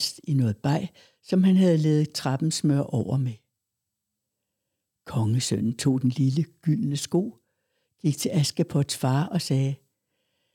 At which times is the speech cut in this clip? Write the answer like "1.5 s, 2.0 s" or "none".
none

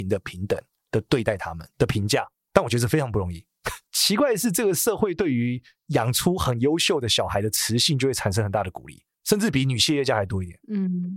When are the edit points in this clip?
3.9 s

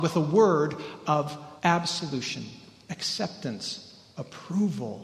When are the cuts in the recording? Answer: 1.6 s

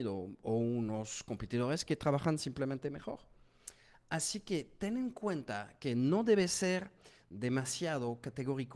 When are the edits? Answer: none

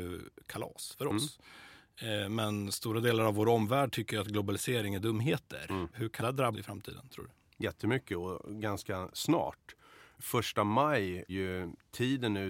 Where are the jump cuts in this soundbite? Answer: 6.2 s, 6.5 s, 11.3 s

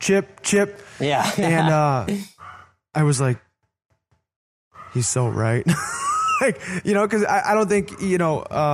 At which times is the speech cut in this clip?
none

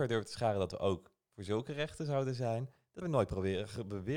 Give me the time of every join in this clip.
3.0 s

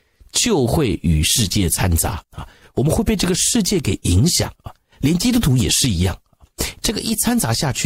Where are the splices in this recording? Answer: 2.2 s, 4.6 s

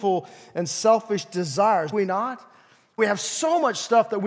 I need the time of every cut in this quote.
1.9 s, 3.0 s

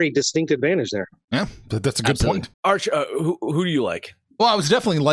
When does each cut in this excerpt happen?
2.5 s

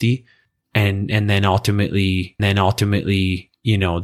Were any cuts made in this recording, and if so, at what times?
2.4 s

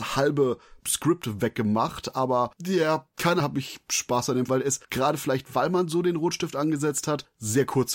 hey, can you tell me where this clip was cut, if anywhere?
2.6 s, 3.4 s, 4.5 s, 4.8 s

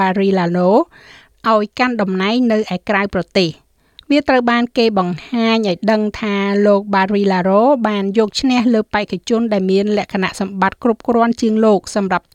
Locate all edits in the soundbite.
none

